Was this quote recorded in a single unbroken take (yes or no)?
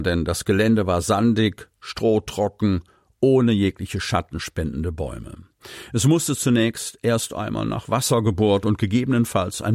yes